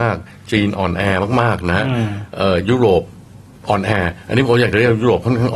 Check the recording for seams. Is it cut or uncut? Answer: uncut